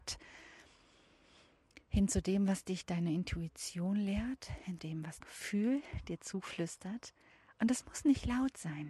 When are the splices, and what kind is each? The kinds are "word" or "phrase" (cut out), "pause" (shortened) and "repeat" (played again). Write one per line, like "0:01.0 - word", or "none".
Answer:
0:04.8 - word
0:05.2 - word
0:07.3 - pause